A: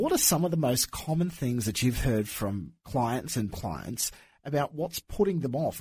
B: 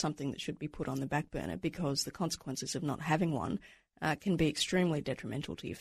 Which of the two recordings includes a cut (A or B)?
A